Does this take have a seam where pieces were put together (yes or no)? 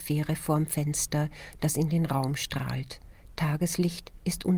no